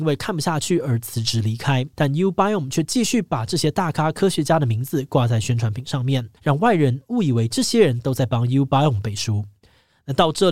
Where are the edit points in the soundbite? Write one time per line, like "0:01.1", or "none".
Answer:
0:01.9
0:06.4